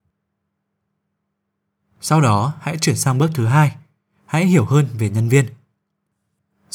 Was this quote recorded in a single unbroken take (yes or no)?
yes